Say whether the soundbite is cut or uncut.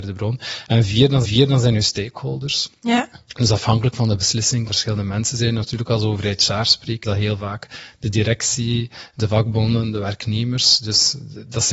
cut